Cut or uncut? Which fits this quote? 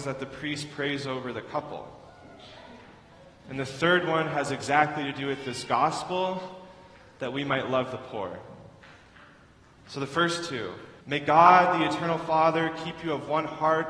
cut